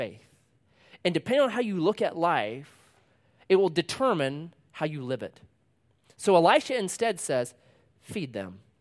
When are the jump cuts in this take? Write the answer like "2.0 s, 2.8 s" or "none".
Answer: none